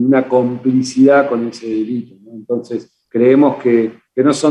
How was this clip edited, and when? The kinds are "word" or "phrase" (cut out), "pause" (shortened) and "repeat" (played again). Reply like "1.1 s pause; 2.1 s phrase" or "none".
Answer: none